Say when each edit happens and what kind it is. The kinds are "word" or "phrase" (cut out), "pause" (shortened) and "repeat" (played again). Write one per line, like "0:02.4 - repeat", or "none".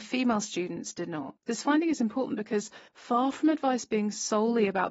0:01.4 - pause
0:02.9 - pause